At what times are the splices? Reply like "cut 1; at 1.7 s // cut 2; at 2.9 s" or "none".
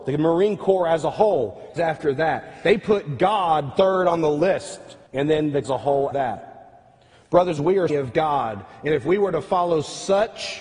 cut 1; at 1.8 s // cut 2; at 5.1 s // cut 3; at 5.6 s // cut 4; at 6.1 s // cut 5; at 7.6 s // cut 6; at 7.9 s